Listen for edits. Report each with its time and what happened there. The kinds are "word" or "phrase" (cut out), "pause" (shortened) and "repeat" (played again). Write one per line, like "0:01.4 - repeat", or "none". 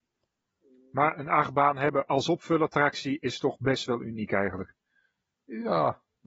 none